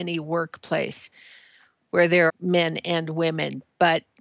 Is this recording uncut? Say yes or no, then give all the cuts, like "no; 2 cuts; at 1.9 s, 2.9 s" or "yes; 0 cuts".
no; 1 cut; at 2.3 s